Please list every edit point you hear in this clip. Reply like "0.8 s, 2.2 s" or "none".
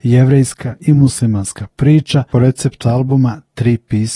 2.3 s, 2.8 s

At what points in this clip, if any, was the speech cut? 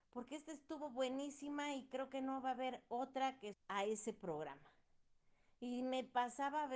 3.5 s

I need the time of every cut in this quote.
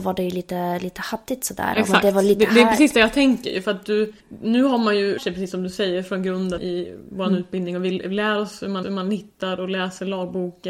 4.2 s, 5.2 s, 6.6 s, 8.8 s

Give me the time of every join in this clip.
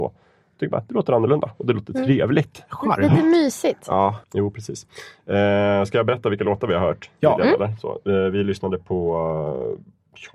4.2 s

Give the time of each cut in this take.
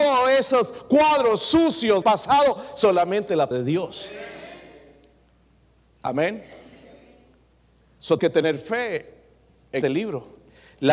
2.0 s, 3.5 s, 8.2 s, 9.8 s

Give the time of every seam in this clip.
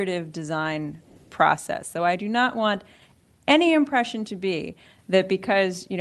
none

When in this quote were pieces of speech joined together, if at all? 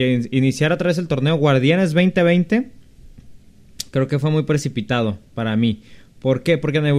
none

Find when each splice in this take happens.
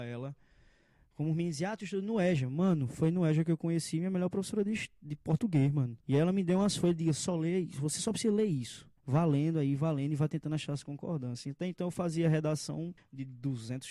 6.0 s, 9.0 s, 13.0 s

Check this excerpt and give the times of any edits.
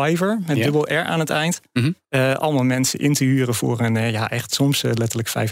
2.0 s

